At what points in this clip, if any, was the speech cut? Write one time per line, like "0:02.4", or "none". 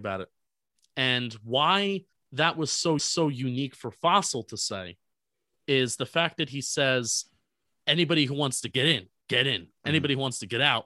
0:02.1
0:03.0